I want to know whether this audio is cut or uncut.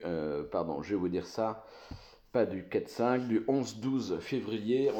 uncut